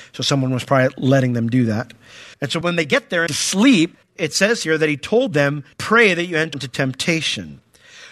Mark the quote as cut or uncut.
cut